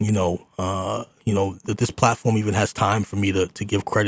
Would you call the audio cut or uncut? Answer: cut